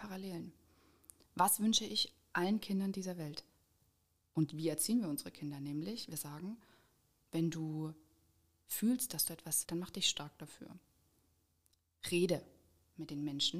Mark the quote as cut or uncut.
cut